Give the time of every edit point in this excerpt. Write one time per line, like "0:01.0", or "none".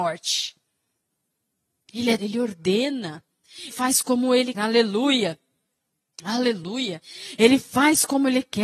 0:02.2
0:03.7
0:04.5